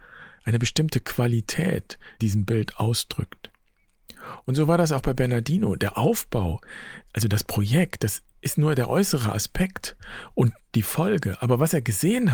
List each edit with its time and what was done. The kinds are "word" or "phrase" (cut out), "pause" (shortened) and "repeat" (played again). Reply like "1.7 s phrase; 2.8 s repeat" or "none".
2.2 s phrase